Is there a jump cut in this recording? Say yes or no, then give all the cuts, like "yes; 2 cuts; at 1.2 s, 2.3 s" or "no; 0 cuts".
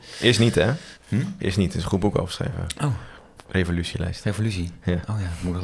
yes; 2 cuts; at 1.0 s, 3.9 s